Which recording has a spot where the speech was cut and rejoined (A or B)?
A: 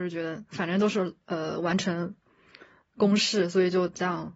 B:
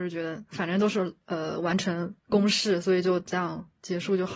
B